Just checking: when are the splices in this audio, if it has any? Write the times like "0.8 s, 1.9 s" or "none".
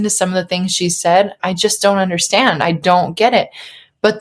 1.4 s